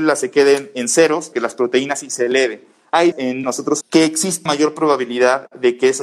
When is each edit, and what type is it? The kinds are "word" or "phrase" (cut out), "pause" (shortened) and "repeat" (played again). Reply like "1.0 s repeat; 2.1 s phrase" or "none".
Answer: 1.3 s word; 3.1 s word; 3.4 s word; 3.8 s word; 4.5 s word